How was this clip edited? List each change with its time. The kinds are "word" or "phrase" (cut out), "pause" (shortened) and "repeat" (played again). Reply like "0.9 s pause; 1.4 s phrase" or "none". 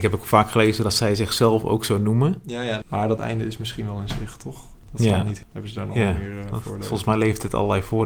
none

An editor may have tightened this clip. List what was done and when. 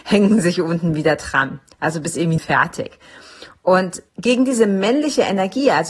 2.4 s word; 4.1 s pause

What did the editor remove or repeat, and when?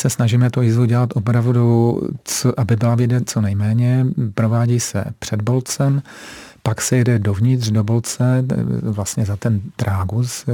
3.3 s word

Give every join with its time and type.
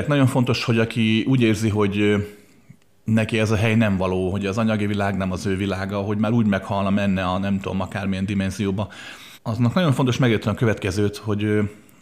9.3 s pause

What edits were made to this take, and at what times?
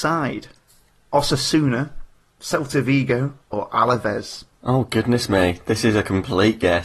3.4 s pause; 4.5 s pause

